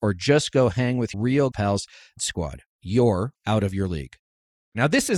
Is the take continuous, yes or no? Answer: no